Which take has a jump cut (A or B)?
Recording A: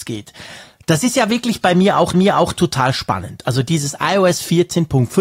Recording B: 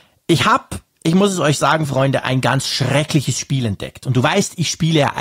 A